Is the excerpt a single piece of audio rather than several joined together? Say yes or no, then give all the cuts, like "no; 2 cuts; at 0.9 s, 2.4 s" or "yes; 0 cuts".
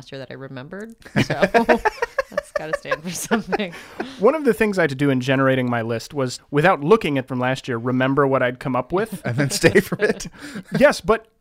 no; 4 cuts; at 4.9 s, 6.4 s, 7.3 s, 9.7 s